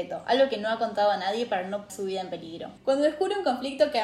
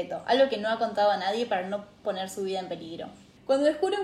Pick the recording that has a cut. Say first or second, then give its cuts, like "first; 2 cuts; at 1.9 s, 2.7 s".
first; 2 cuts; at 1.9 s, 2.8 s